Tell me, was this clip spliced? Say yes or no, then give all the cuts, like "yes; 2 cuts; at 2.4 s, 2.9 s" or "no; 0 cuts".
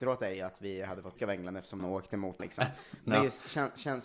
yes; 3 cuts; at 1.2 s, 1.8 s, 2.4 s